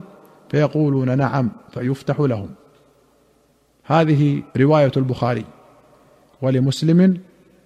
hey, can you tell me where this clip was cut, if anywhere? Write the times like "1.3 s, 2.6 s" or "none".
4.5 s